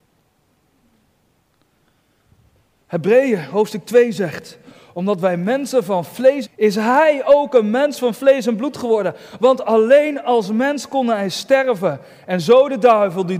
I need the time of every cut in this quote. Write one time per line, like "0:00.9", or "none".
0:06.4